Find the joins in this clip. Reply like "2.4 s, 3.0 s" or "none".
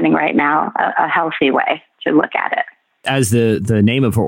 none